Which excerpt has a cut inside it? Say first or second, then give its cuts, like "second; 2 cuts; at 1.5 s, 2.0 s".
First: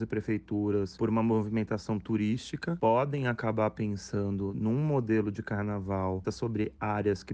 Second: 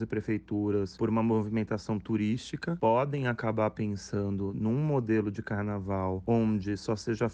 first; 1 cut; at 6.2 s